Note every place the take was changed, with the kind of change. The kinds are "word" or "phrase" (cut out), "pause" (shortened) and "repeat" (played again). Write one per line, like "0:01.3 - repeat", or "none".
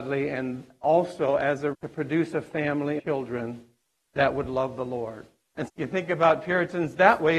0:01.7 - word
0:03.0 - word
0:05.7 - word